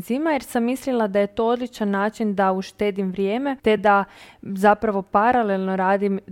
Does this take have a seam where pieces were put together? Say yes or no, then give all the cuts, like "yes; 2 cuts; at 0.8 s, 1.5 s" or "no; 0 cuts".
no; 0 cuts